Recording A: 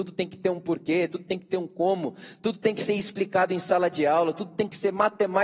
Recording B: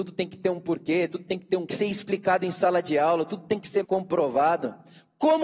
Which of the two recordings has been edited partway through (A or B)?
B